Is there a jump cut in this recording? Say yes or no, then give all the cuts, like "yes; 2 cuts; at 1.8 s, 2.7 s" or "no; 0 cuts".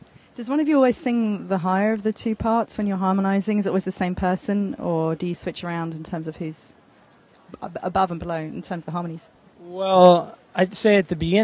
no; 0 cuts